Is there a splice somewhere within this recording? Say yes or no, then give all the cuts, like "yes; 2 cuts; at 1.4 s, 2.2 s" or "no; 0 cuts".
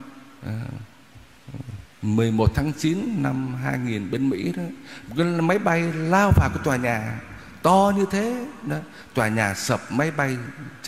yes; 1 cut; at 1.9 s